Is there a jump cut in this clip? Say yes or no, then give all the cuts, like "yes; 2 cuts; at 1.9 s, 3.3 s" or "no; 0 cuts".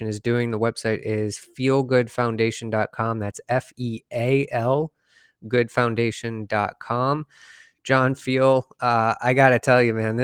no; 0 cuts